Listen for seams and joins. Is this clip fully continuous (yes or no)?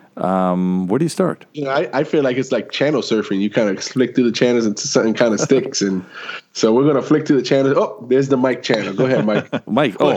no